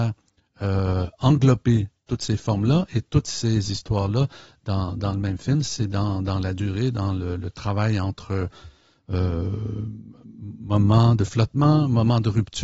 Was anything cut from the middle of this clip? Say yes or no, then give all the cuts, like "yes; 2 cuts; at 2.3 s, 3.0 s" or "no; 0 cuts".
no; 0 cuts